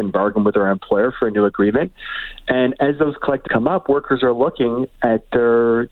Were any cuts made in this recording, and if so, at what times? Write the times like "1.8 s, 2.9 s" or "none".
3.5 s